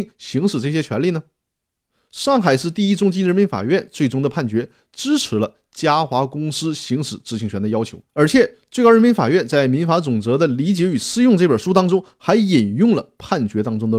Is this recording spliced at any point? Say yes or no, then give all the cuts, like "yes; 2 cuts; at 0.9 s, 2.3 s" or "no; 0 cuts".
yes; 1 cut; at 8.1 s